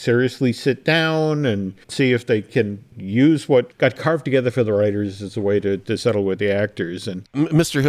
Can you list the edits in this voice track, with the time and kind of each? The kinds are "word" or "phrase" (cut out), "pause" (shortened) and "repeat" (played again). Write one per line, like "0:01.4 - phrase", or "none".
0:01.8 - pause

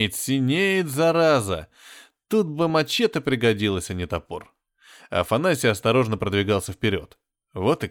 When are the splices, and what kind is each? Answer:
none

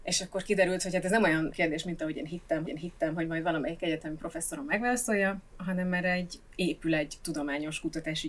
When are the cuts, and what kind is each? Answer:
0:01.5 - word
0:02.7 - repeat
0:05.5 - word

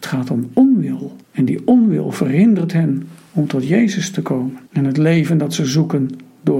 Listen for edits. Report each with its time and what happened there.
0:01.2 - pause
0:04.7 - pause

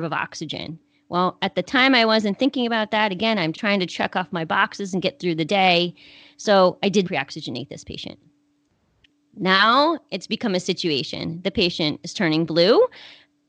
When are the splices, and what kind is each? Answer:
0:03.5 - word
0:07.0 - word

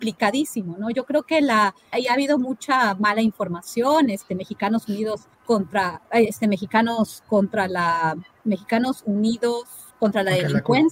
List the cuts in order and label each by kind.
0:01.9 - word
0:05.3 - pause
0:09.9 - pause

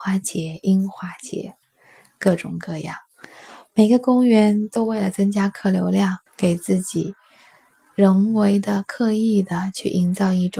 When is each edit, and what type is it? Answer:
0:06.3 - pause

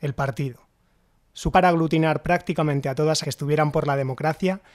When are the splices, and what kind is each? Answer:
0:01.5 - word
0:03.2 - phrase

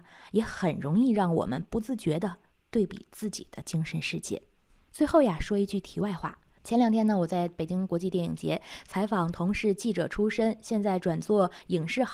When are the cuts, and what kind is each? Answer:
none

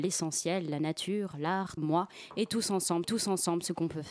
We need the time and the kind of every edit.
0:01.8 - word
0:03.0 - repeat

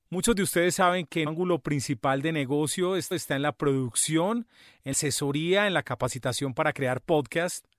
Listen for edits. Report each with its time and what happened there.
0:01.3 - word
0:03.1 - repeat
0:04.9 - word

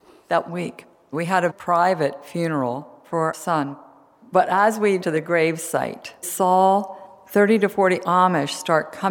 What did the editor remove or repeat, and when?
0:01.5 - word
0:03.3 - word
0:05.0 - word
0:06.2 - word

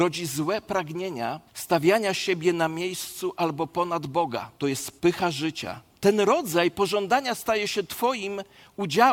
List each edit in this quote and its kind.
0:01.5 - pause
0:04.6 - pause
0:05.0 - pause
0:05.9 - pause

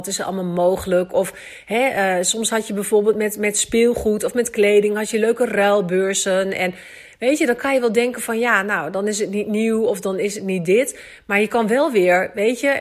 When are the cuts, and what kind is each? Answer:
none

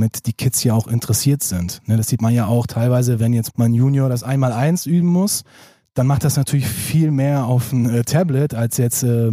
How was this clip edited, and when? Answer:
0:03.5 - word

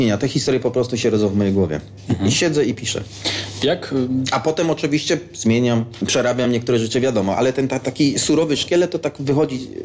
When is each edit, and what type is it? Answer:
none

